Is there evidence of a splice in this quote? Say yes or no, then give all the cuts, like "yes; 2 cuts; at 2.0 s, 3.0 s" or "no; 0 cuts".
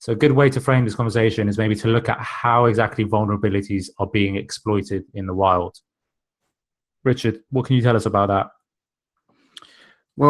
no; 0 cuts